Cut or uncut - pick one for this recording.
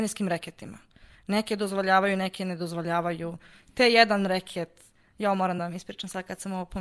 uncut